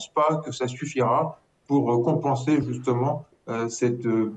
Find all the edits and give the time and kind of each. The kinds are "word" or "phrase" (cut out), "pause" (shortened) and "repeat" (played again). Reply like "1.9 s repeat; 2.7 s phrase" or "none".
none

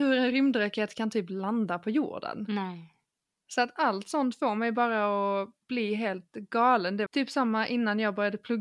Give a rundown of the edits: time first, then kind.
7.1 s word

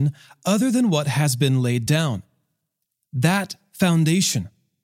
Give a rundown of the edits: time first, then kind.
none

